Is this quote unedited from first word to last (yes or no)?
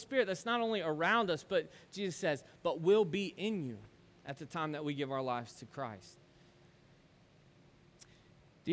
no